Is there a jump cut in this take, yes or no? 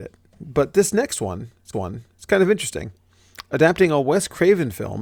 yes